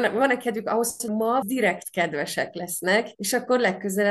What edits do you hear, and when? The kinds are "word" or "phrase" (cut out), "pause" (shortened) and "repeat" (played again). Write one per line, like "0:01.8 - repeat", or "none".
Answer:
0:01.1 - word
0:01.4 - word
0:03.1 - pause